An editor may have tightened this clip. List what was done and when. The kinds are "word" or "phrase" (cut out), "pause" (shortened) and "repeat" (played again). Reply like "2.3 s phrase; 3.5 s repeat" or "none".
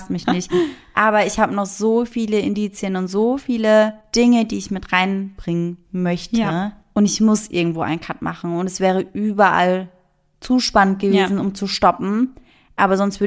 none